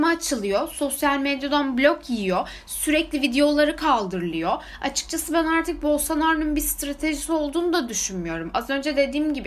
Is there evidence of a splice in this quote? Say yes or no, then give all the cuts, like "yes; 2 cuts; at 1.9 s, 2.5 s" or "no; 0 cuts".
no; 0 cuts